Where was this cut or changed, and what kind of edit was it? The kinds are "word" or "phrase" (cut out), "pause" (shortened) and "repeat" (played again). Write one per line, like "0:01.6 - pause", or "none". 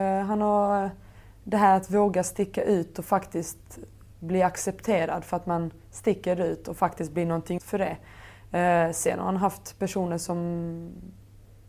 0:07.6 - word

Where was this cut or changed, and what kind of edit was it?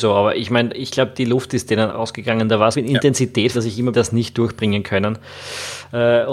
0:01.9 - word
0:02.7 - word
0:03.5 - phrase
0:03.9 - phrase

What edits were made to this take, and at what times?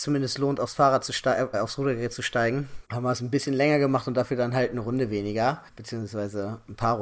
0:01.5 - word
0:02.8 - pause
0:05.7 - pause

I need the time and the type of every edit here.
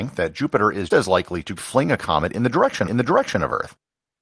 0:00.9 - word
0:01.6 - word
0:02.9 - repeat

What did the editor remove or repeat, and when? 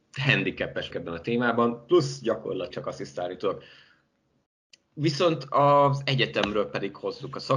0:00.9 - word
0:02.7 - phrase

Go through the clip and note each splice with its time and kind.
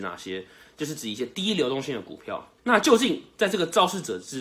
0:02.6 - pause

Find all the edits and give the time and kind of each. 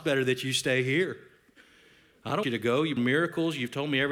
0:02.4 - word
0:03.0 - word

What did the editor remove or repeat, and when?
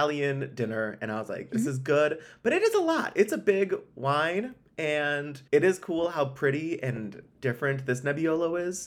0:05.5 - pause
0:07.3 - pause

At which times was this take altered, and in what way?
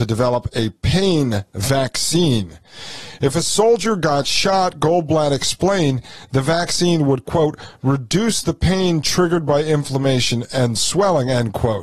none

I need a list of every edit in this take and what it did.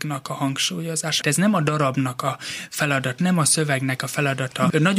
0:01.2 - word
0:03.2 - word

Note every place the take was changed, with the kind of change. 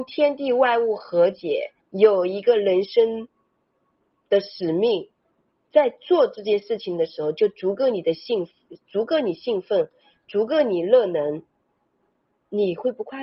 0:01.8 - pause

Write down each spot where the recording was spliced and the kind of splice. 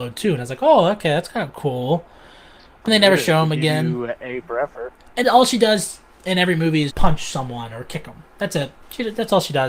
0:02.9 - word
0:05.2 - word
0:06.9 - word

